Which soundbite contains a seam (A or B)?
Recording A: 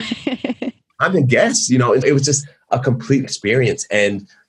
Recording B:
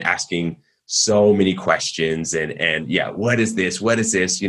A